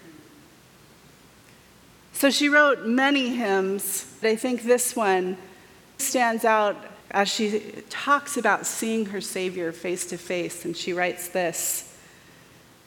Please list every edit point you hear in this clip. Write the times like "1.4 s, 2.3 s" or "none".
4.2 s, 6.0 s, 7.0 s

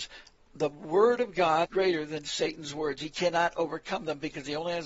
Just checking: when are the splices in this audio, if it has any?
1.7 s

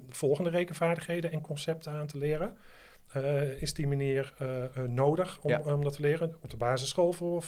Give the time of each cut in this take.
none

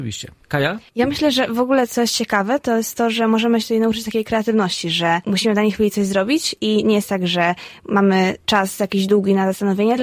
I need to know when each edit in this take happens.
8.4 s

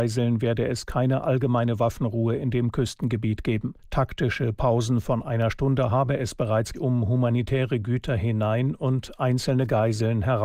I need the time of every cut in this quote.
3.8 s, 6.7 s

